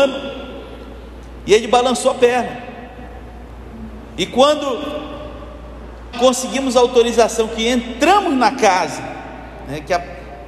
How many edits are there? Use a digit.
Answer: 1